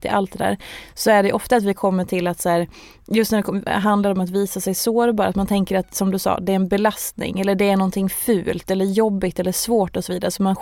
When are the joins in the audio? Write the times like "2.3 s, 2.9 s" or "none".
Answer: none